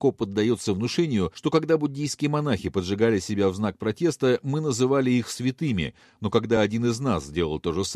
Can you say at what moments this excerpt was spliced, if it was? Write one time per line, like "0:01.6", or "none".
none